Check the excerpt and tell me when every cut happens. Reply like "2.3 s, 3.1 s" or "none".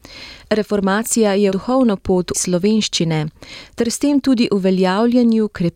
1.5 s, 2.3 s